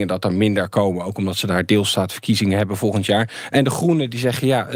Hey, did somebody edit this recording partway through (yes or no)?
no